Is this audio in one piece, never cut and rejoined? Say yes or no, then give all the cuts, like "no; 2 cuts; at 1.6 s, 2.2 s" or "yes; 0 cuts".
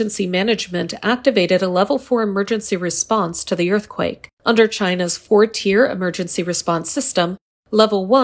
no; 1 cut; at 4.3 s